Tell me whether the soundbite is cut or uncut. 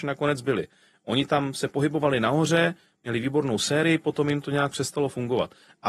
uncut